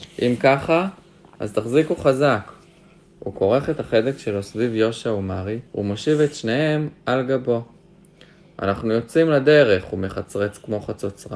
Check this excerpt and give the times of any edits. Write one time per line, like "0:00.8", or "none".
0:05.7